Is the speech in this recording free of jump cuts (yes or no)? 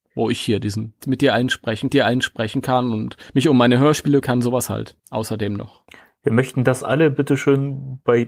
no